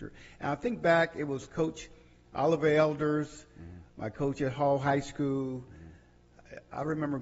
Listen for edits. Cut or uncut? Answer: uncut